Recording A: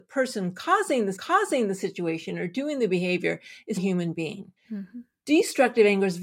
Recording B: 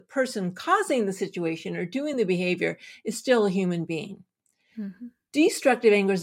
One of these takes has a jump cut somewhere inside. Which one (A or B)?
A